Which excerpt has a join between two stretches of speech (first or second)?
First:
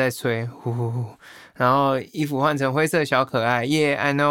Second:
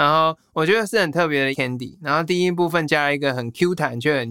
second